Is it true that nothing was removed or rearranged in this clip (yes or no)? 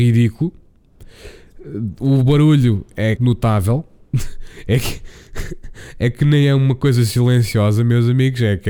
no